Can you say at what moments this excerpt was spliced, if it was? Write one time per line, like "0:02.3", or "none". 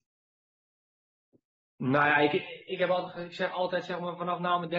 none